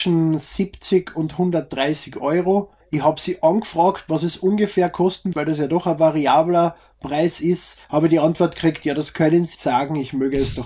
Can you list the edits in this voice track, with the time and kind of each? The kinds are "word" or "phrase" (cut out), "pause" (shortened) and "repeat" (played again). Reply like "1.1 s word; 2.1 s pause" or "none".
2.8 s pause; 5.3 s word; 7.8 s pause; 9.5 s phrase